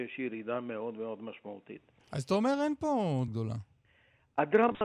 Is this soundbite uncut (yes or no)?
no